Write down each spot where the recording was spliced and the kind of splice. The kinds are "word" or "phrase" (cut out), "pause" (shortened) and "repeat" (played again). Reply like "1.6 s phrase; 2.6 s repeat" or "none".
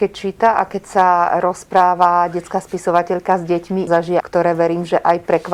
3.9 s word; 4.2 s phrase